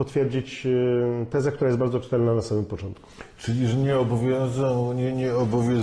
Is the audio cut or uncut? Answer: uncut